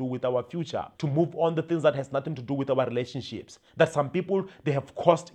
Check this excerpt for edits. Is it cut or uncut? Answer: cut